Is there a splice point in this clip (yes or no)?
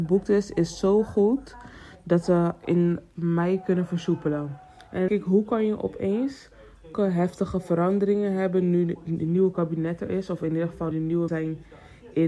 yes